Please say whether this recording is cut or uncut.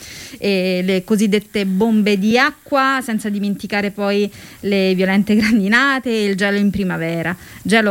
uncut